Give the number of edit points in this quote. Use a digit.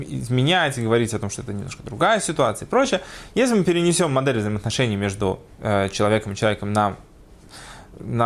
0